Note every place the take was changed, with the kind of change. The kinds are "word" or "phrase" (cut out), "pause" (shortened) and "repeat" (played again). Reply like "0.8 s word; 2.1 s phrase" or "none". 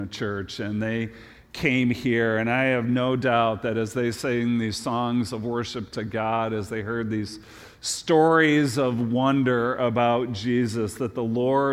none